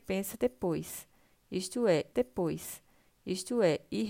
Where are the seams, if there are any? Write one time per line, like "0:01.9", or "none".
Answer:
0:02.1